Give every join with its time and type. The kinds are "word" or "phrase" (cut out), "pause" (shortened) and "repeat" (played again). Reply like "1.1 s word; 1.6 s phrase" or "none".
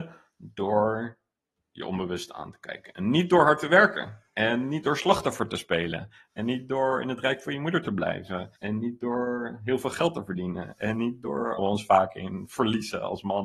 4.3 s pause; 8.6 s pause; 11.6 s phrase